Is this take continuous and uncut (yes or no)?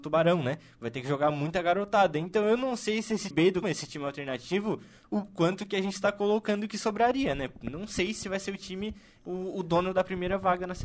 no